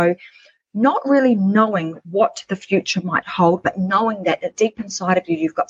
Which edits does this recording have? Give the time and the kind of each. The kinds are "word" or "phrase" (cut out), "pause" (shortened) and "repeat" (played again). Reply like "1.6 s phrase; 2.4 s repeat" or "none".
none